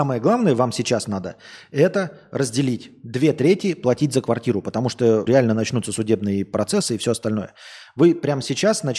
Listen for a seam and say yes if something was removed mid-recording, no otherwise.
yes